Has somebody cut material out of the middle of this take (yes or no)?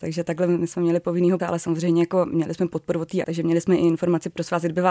yes